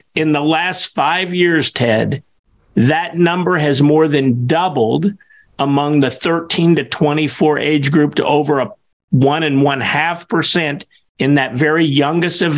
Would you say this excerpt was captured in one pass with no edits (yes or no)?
yes